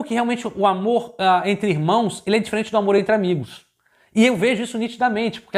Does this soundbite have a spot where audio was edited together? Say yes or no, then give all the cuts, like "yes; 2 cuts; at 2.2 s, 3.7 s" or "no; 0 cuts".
no; 0 cuts